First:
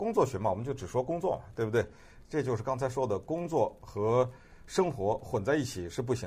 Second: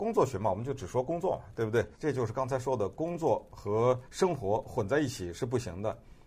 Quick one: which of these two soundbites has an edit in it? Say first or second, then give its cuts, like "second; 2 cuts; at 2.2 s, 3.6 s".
second; 2 cuts; at 1.9 s, 4.0 s